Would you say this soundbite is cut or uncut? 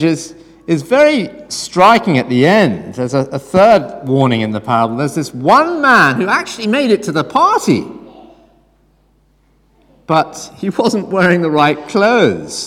uncut